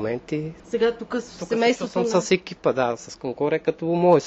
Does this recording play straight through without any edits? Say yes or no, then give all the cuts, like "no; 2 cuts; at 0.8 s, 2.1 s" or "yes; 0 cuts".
yes; 0 cuts